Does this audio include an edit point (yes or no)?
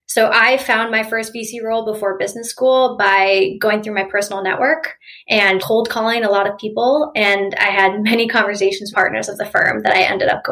yes